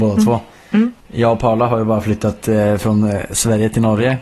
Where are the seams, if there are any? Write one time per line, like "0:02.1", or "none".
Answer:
none